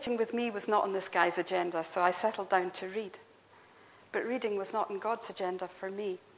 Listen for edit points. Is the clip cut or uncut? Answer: uncut